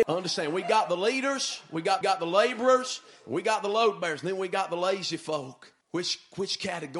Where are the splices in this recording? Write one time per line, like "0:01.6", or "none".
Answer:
0:02.0
0:05.8